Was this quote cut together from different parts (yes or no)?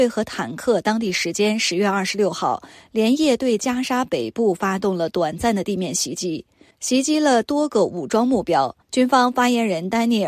yes